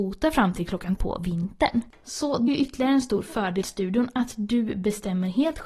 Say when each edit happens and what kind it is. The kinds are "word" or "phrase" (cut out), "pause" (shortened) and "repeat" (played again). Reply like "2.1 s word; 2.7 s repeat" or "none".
1.0 s word; 2.5 s word; 3.6 s word